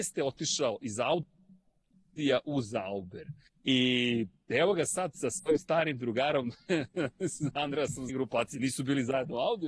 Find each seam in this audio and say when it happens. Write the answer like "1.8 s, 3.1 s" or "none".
3.5 s, 8.1 s